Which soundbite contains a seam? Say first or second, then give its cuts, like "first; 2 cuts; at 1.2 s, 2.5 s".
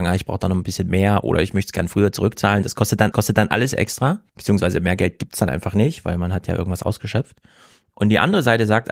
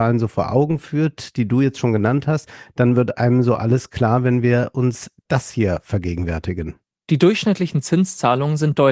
first; 2 cuts; at 3.1 s, 4.3 s